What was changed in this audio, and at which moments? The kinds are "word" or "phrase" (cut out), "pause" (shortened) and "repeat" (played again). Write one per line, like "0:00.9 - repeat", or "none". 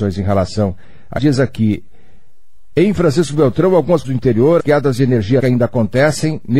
0:01.2 - phrase
0:04.0 - word
0:04.6 - word
0:05.4 - word